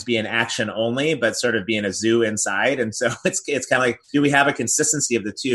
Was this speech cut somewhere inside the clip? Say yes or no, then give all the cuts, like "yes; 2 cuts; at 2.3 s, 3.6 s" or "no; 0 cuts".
yes; 1 cut; at 4.0 s